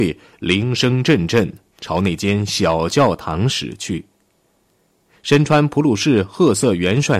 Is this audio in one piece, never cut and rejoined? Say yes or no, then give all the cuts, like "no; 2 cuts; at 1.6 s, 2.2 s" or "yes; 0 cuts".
yes; 0 cuts